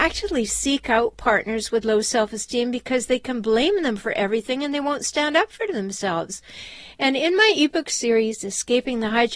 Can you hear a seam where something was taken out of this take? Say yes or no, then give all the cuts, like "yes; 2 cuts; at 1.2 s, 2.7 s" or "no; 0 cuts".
no; 0 cuts